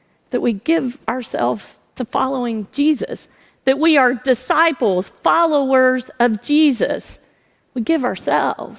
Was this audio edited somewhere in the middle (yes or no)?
no